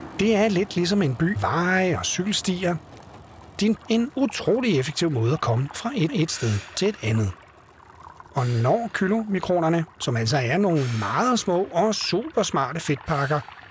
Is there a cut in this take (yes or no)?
yes